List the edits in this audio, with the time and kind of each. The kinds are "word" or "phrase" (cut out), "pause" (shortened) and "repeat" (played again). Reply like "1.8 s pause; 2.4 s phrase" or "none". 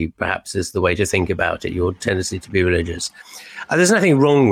none